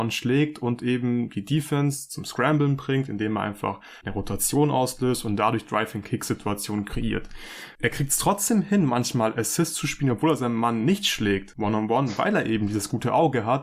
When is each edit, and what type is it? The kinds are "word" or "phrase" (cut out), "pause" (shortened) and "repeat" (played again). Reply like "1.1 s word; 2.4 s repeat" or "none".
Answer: none